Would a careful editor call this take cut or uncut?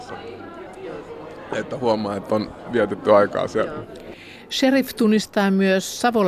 uncut